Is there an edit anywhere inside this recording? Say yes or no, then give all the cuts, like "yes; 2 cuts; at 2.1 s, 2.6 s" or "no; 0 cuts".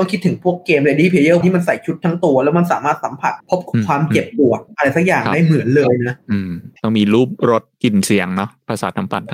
yes; 4 cuts; at 1.4 s, 3.4 s, 6.2 s, 6.8 s